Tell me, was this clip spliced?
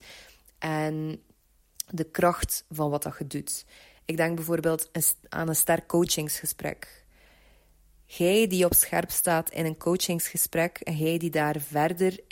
no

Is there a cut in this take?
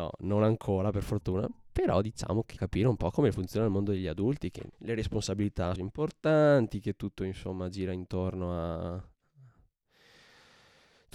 yes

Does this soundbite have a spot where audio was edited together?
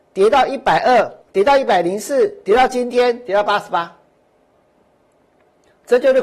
yes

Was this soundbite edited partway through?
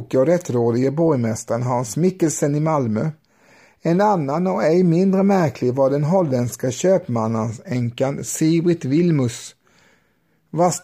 no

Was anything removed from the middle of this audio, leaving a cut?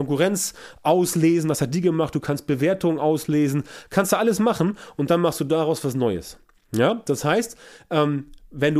no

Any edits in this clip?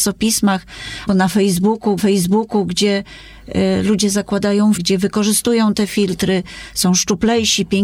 yes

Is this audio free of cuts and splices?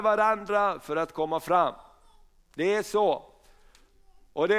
yes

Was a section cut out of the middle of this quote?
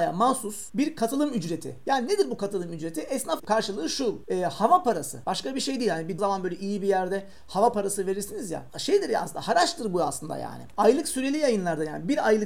yes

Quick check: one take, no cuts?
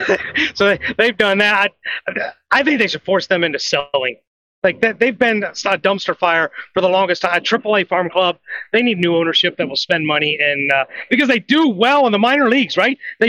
yes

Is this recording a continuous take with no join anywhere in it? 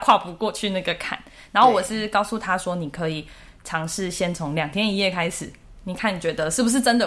yes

